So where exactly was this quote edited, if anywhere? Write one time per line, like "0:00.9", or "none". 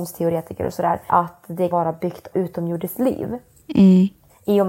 0:01.1
0:01.7
0:02.3